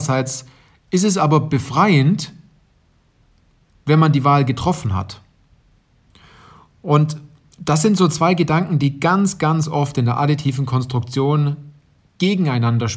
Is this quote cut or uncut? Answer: uncut